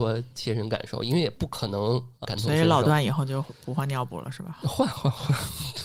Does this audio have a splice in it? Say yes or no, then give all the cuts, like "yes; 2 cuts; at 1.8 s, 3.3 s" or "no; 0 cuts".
yes; 1 cut; at 2.2 s